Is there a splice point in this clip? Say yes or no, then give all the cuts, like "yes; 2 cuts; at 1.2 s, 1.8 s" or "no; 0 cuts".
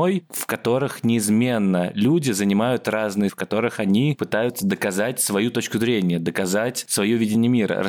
yes; 1 cut; at 3.3 s